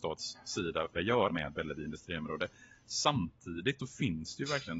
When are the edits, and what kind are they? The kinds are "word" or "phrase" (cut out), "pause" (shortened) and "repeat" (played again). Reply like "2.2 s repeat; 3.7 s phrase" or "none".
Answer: 0.9 s phrase; 1.3 s word; 3.8 s word